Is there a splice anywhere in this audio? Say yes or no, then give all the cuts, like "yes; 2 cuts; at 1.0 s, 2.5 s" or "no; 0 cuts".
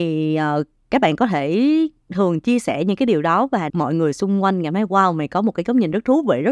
yes; 1 cut; at 3.7 s